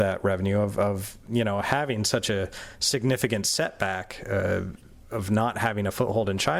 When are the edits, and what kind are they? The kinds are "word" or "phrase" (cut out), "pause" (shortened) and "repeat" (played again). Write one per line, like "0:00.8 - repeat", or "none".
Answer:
none